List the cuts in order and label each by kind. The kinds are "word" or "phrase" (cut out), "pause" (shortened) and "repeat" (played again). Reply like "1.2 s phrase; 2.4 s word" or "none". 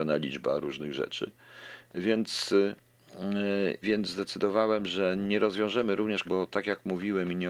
3.8 s word; 6.2 s word